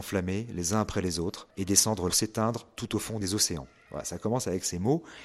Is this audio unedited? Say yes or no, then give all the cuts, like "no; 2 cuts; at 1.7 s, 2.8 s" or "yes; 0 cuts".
no; 2 cuts; at 1.5 s, 2.1 s